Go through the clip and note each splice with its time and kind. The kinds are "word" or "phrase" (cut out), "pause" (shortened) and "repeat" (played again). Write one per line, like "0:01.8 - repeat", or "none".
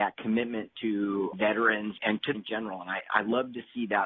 0:01.3 - word
0:02.0 - word
0:02.3 - word